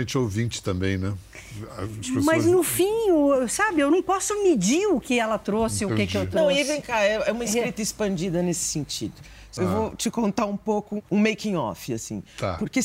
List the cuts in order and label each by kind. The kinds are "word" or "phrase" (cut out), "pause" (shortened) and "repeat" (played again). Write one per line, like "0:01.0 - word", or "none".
0:05.0 - word
0:11.1 - pause